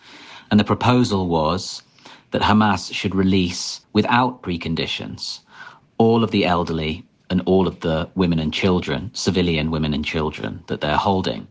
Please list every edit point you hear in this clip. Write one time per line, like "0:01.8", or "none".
0:03.8